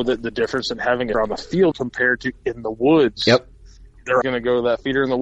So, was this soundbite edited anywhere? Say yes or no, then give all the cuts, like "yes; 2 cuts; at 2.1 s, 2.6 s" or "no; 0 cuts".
yes; 3 cuts; at 1.1 s, 1.7 s, 4.2 s